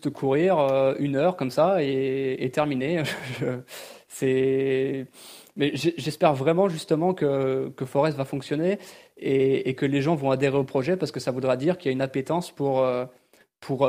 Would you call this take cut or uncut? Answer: uncut